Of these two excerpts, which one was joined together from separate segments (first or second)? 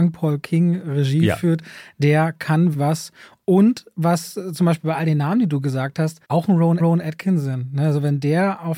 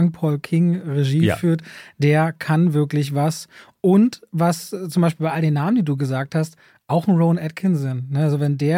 first